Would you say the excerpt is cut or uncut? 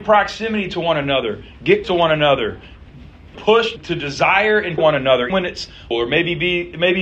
cut